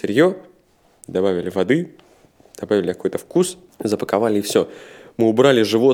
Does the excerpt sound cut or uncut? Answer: uncut